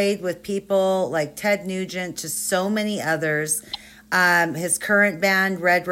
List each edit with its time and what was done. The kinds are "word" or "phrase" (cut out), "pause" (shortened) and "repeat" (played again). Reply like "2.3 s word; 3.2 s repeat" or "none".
none